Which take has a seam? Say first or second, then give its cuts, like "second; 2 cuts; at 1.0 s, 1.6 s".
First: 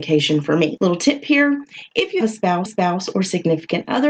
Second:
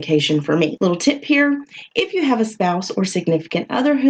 first; 2 cuts; at 2.2 s, 2.7 s